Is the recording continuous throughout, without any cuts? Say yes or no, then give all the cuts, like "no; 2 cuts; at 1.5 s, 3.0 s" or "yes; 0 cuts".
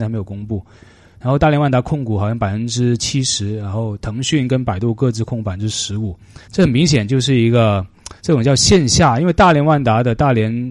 no; 2 cuts; at 6.4 s, 8.2 s